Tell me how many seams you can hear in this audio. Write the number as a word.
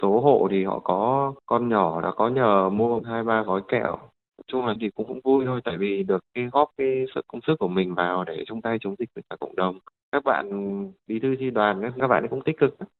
zero